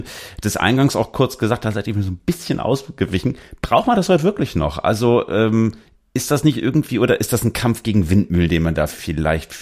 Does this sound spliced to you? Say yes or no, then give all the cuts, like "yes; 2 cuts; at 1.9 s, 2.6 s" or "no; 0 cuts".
no; 0 cuts